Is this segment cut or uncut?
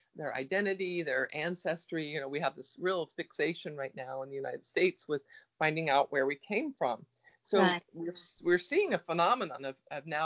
uncut